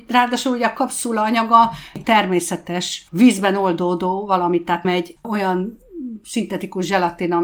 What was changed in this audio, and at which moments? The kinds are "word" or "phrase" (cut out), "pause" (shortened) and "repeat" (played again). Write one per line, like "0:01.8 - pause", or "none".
0:02.0 - word
0:03.1 - pause
0:04.8 - word